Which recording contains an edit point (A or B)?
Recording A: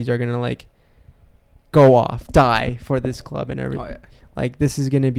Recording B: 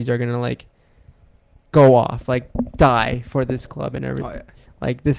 A